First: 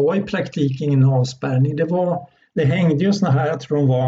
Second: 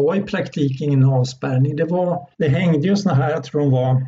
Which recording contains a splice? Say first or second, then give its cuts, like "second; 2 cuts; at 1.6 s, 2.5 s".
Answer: second; 1 cut; at 2.3 s